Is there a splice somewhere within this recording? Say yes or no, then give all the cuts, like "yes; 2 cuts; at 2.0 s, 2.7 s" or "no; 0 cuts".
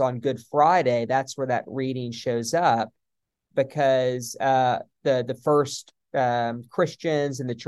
no; 0 cuts